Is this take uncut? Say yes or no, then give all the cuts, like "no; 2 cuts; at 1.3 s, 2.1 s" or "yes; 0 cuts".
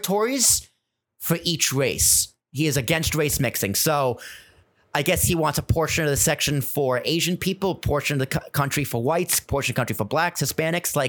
yes; 0 cuts